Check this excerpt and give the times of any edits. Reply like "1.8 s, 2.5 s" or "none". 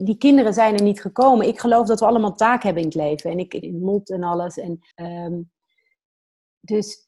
3.6 s, 4.9 s